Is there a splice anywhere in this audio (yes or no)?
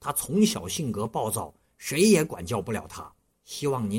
no